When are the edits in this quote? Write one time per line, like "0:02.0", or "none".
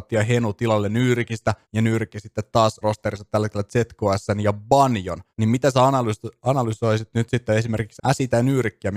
0:01.6
0:02.8
0:05.3
0:08.0